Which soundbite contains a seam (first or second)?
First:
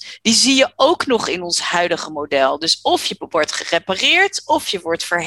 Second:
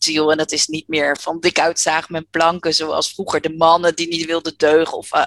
second